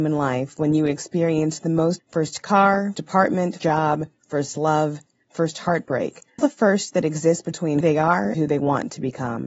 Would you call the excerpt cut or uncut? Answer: cut